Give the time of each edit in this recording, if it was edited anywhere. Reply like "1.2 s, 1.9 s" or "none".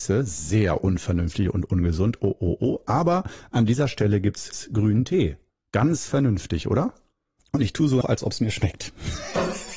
4.5 s, 7.4 s, 8.0 s